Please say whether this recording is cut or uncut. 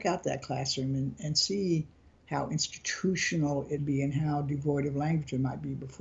cut